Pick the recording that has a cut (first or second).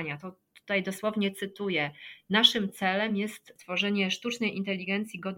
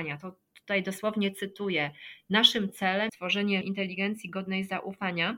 second